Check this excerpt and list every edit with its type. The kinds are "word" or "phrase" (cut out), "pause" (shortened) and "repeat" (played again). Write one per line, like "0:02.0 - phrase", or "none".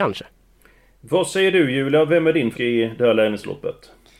0:02.5 - word